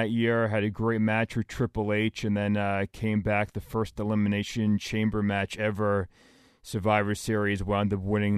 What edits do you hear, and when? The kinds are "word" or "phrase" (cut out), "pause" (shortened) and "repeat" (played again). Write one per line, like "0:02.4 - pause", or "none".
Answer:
none